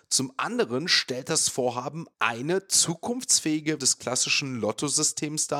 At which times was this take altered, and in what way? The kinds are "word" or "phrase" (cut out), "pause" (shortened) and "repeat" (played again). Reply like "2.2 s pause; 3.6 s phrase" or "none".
3.8 s word